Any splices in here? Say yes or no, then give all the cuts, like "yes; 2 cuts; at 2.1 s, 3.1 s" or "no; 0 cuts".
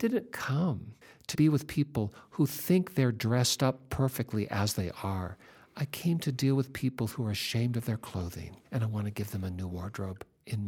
yes; 2 cuts; at 1.3 s, 8.6 s